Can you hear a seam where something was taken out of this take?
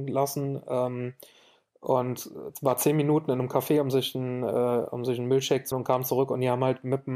yes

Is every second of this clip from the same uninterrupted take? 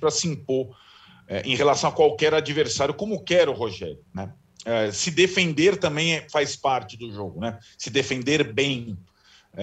no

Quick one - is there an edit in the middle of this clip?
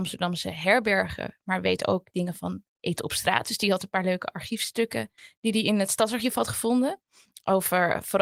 yes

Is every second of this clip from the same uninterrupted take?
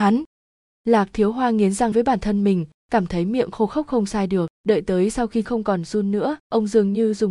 no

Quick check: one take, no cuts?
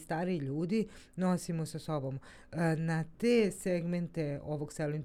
yes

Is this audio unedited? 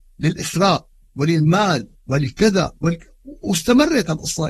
yes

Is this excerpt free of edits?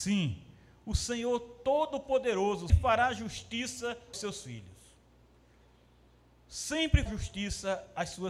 no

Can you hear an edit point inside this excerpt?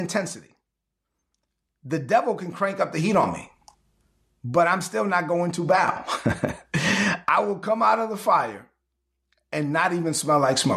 no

